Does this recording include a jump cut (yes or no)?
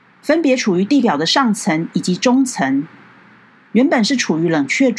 no